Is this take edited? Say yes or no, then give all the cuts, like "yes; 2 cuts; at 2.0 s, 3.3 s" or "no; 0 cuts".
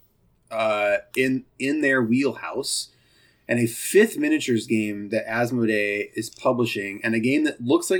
no; 0 cuts